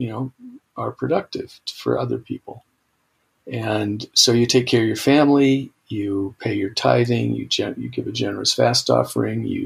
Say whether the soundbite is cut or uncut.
uncut